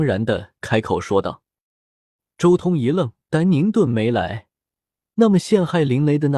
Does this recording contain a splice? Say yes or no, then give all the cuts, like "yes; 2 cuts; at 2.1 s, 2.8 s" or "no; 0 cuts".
yes; 1 cut; at 3.2 s